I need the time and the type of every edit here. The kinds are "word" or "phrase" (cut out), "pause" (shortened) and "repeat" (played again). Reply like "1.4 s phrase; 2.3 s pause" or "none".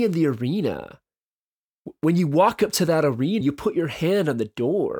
3.4 s word